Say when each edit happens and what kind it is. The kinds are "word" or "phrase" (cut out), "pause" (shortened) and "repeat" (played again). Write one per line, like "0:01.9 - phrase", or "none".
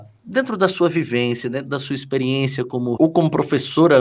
0:03.0 - word